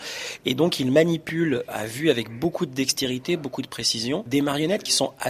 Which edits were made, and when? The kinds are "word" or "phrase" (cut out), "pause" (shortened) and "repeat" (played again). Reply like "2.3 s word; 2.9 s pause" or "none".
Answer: none